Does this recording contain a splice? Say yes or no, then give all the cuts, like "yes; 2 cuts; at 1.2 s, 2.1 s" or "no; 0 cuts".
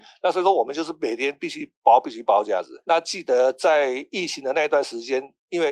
yes; 1 cut; at 2.8 s